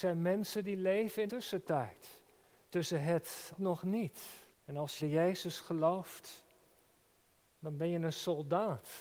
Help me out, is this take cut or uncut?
cut